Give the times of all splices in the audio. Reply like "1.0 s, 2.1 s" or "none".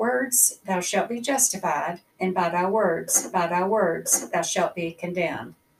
2.1 s, 3.3 s